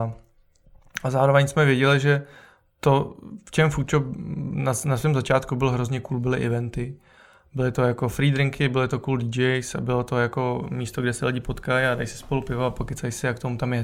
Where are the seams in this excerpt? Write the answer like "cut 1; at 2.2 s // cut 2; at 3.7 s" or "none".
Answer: none